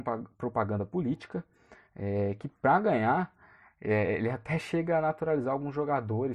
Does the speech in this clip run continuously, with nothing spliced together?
yes; 0 cuts

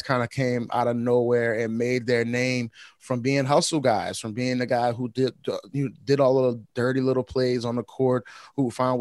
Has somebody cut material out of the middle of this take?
no; 0 cuts

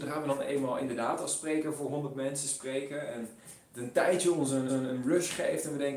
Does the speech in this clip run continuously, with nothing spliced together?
no; 1 cut; at 4.7 s

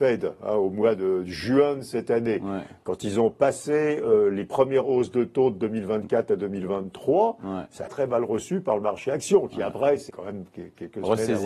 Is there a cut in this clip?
yes; 2 cuts; at 7.9 s, 10.1 s

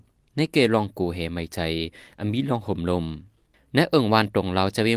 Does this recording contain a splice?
no; 0 cuts

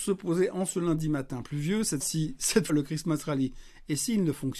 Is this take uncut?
no; 2 cuts; at 2.0 s, 2.7 s

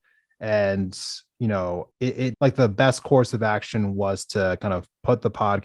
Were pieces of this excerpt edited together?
yes; 2 cuts; at 1.9 s, 2.3 s

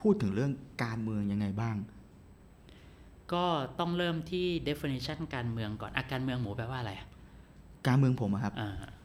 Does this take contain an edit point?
no; 0 cuts

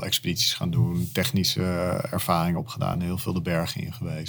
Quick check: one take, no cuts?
yes; 0 cuts

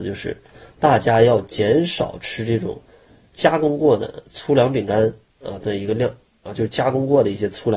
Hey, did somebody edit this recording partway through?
no; 0 cuts

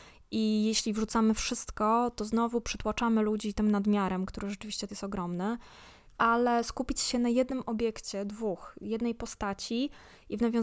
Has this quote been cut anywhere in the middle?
yes; 1 cut; at 4.9 s

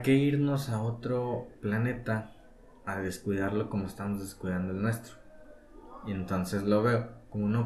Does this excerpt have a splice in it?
no; 0 cuts

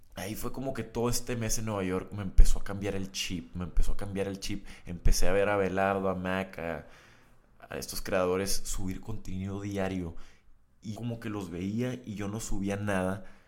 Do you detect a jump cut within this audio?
yes; 1 cut; at 10.9 s

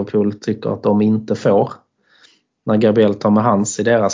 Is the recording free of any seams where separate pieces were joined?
yes; 0 cuts

